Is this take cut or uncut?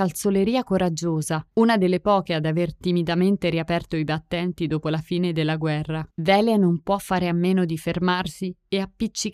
cut